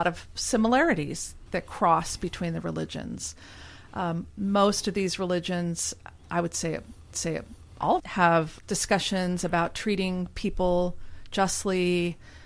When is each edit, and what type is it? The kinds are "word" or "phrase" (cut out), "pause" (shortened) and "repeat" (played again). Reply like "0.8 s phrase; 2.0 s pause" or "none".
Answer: 1.5 s word; 6.2 s pause; 7.1 s repeat; 8.0 s word; 8.6 s word